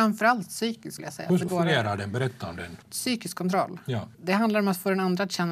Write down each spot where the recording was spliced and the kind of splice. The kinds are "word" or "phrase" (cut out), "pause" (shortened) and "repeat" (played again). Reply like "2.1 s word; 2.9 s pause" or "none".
1.0 s word; 1.5 s word; 2.8 s pause; 4.1 s pause

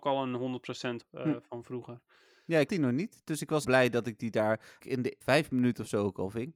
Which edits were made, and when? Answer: 1.0 s word; 1.6 s word; 2.7 s word; 3.6 s word; 4.8 s word; 5.2 s word

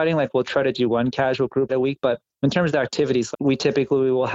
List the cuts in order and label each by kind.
1.7 s word; 3.3 s word

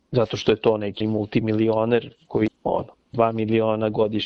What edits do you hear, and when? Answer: 1.0 s word; 2.5 s word; 3.1 s word

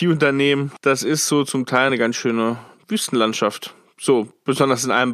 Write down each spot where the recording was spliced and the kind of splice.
none

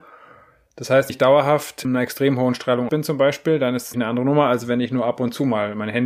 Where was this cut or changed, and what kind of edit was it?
1.1 s word; 1.8 s word; 2.9 s word; 3.9 s word

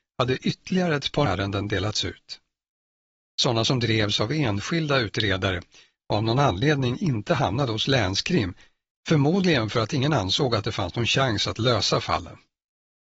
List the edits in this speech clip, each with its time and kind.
1.3 s word

